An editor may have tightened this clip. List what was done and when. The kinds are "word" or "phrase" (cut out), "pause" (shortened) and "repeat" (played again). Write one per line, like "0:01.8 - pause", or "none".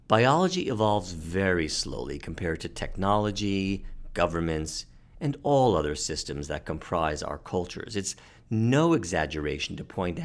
none